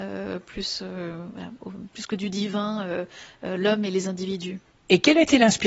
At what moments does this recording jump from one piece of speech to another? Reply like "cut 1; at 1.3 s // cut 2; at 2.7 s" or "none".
none